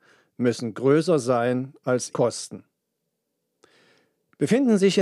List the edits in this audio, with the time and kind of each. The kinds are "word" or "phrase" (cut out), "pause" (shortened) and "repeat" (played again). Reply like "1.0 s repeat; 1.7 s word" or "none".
2.1 s word